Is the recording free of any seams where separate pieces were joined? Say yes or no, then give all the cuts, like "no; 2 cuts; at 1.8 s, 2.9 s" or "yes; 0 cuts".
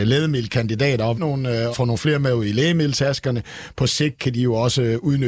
no; 2 cuts; at 1.1 s, 1.7 s